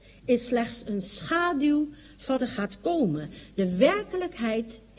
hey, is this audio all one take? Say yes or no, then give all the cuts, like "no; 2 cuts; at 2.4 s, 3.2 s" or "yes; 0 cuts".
no; 1 cut; at 2.4 s